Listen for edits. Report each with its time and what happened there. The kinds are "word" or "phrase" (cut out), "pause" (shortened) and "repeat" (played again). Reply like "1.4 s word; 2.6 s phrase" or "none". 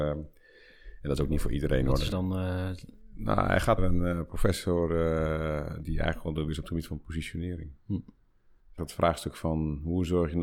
2.1 s word; 3.8 s word; 5.8 s word; 6.5 s word; 8.8 s word